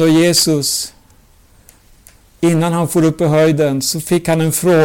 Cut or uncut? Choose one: uncut